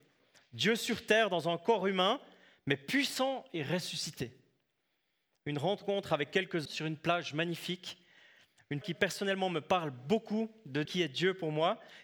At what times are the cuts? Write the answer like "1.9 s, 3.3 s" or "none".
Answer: 6.7 s, 8.8 s, 10.9 s